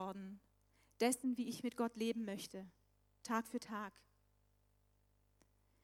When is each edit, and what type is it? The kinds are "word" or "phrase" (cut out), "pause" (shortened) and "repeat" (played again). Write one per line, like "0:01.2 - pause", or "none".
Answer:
none